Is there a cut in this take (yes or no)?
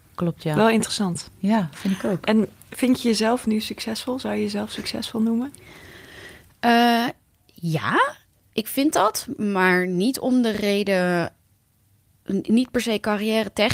no